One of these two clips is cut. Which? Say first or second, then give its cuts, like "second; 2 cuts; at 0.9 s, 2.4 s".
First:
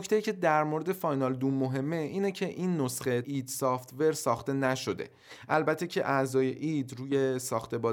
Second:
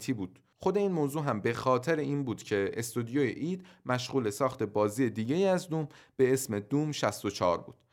first; 1 cut; at 3.2 s